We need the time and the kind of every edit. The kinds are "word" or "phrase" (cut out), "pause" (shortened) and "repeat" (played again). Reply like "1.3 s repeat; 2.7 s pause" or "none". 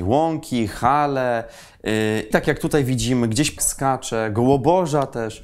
2.3 s word; 3.6 s word